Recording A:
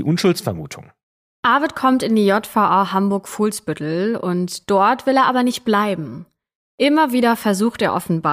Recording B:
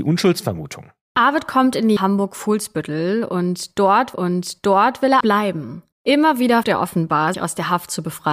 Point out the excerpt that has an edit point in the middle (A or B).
B